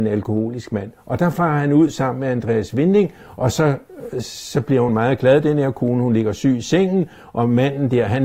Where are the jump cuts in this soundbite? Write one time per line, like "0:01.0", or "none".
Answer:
none